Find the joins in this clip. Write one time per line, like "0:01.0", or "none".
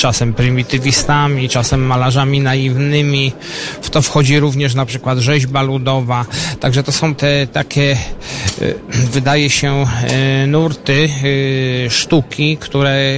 0:07.2